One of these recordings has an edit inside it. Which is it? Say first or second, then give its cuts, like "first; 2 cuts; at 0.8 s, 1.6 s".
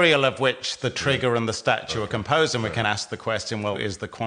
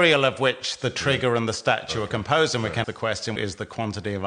second; 2 cuts; at 2.8 s, 3.4 s